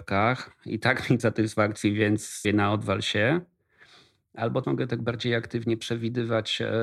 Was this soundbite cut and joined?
yes; 3 cuts; at 1.2 s, 2.4 s, 4.6 s

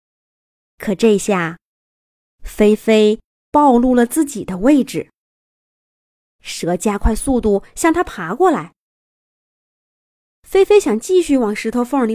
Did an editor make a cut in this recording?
no; 0 cuts

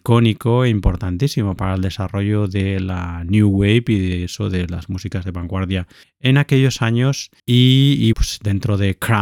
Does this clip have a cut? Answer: yes; 3 cuts; at 6.0 s, 7.4 s, 8.1 s

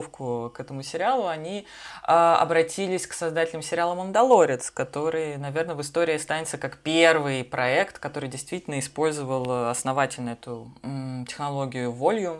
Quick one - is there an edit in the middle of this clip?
no; 0 cuts

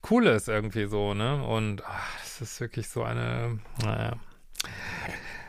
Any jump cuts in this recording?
no; 0 cuts

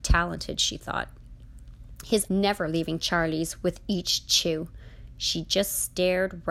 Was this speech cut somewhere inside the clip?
yes; 1 cut; at 2.3 s

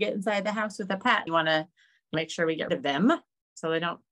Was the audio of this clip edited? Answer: yes; 3 cuts; at 1.3 s, 2.1 s, 2.7 s

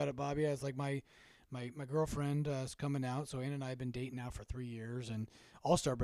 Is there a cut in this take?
no; 0 cuts

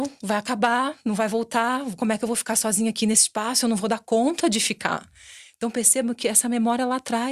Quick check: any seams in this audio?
no; 0 cuts

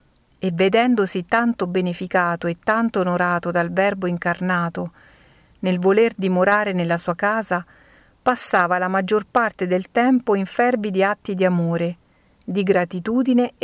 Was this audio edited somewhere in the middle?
no; 0 cuts

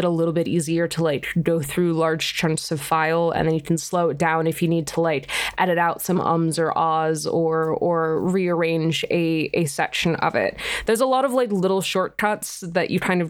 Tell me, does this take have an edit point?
no; 0 cuts

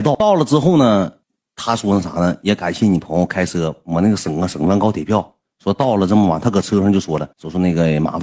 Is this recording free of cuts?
no; 2 cuts; at 1.2 s, 7.3 s

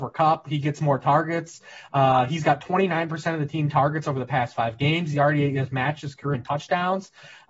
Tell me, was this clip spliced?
yes; 1 cut; at 6.3 s

